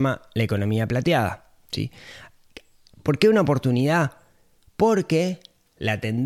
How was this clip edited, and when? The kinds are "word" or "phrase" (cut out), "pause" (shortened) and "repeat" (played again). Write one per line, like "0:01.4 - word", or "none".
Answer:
none